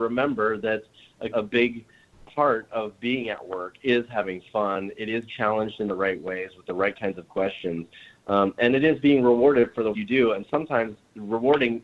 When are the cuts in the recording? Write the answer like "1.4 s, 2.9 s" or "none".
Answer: 1.3 s, 5.3 s, 9.9 s